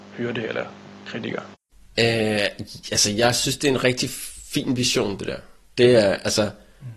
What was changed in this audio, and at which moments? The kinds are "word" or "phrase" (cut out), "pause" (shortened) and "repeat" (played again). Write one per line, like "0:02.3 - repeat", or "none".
none